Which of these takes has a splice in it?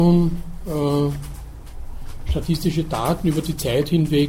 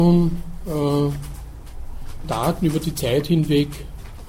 second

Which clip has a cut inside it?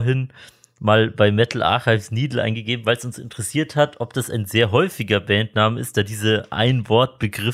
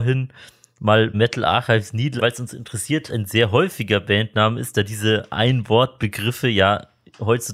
second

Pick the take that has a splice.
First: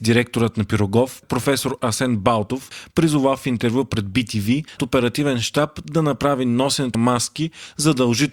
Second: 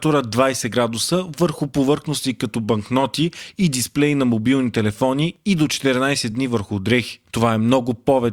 first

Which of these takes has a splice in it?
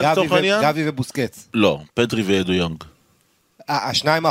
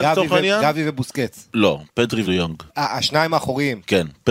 second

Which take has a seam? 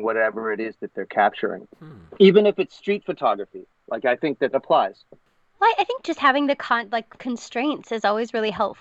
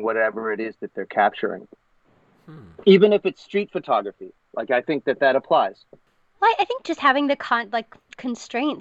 first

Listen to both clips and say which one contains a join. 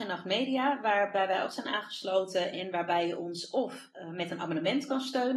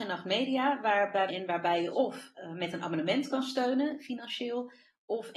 second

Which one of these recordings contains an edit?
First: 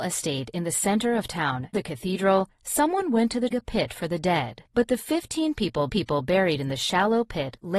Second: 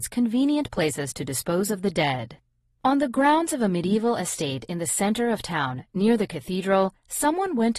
first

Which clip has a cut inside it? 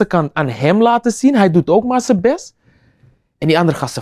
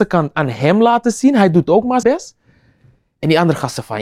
second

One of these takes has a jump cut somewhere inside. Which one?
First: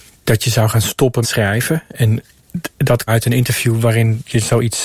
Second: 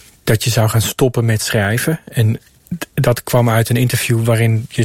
first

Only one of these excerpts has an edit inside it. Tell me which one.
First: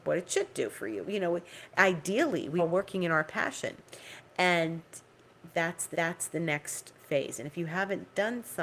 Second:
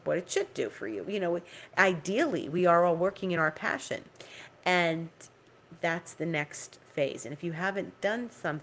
first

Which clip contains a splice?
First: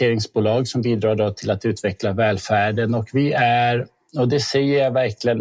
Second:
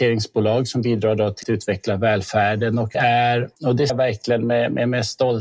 second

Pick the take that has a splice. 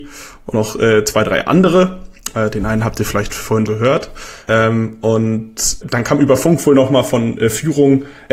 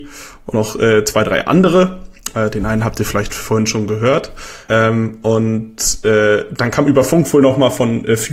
first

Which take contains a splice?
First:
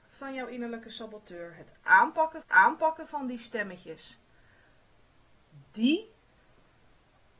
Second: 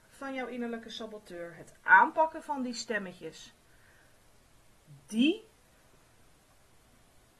first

